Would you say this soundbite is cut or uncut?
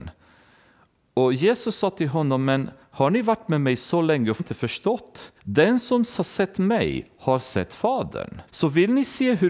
cut